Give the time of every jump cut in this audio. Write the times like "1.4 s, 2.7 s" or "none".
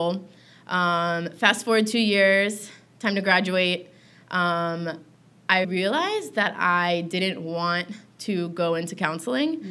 5.6 s